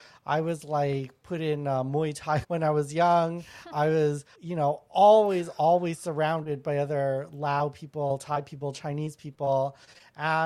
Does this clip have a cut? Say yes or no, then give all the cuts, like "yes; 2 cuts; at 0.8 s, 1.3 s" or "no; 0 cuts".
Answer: yes; 3 cuts; at 2.4 s, 3.7 s, 4.3 s